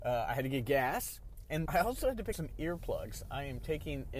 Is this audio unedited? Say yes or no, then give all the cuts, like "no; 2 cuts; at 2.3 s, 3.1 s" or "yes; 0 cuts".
no; 2 cuts; at 1.7 s, 2.3 s